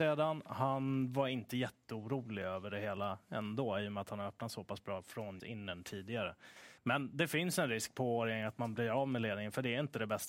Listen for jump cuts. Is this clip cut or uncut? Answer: cut